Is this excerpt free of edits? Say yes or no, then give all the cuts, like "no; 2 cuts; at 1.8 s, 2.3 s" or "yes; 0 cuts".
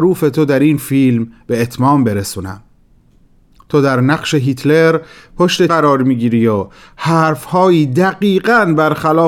no; 1 cut; at 5.7 s